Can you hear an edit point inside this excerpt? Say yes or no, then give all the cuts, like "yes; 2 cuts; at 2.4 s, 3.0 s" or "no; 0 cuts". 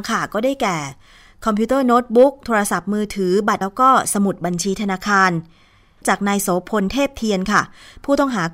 yes; 1 cut; at 3.6 s